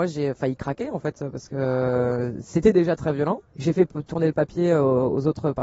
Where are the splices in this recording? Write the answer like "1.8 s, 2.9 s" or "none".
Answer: 3.5 s